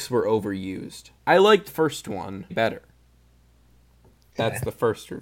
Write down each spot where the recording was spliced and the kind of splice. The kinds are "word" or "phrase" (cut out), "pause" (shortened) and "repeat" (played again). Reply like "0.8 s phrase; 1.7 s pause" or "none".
1.2 s pause; 1.7 s word; 2.5 s word